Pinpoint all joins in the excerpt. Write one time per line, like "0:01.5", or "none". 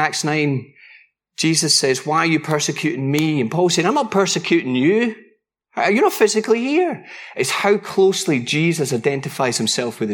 none